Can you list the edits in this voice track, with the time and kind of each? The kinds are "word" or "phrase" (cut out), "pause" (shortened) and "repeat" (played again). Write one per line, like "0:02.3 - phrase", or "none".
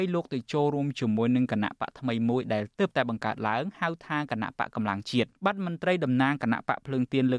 0:05.4 - pause